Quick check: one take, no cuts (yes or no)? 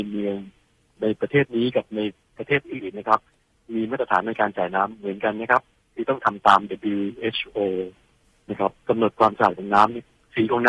yes